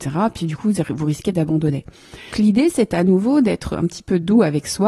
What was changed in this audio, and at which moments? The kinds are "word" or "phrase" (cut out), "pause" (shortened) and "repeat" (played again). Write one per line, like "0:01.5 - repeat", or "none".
0:02.3 - word